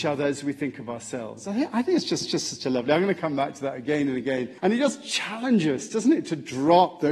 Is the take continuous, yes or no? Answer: no